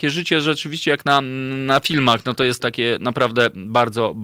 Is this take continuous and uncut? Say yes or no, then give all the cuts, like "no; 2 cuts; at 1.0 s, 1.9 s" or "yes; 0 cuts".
no; 1 cut; at 2.6 s